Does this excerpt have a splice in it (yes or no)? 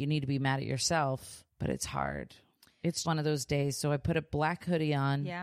yes